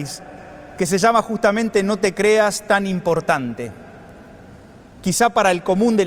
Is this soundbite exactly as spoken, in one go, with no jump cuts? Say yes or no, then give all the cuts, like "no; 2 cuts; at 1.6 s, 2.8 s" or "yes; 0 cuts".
yes; 0 cuts